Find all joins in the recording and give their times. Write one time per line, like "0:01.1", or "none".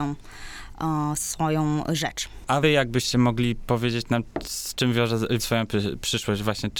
0:02.6
0:05.4